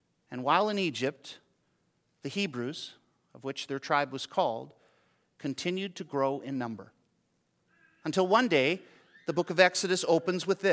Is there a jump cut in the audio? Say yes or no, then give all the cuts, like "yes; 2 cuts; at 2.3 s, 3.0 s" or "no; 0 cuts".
no; 0 cuts